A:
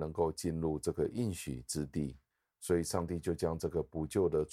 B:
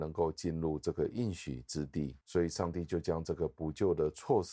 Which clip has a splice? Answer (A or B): B